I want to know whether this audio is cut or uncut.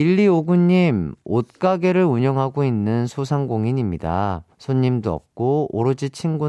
cut